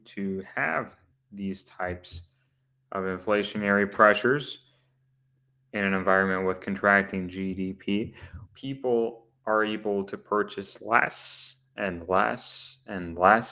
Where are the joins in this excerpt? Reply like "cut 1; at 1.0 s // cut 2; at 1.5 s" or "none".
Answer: cut 1; at 8.5 s